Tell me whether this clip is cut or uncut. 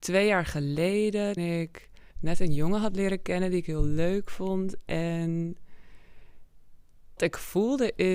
cut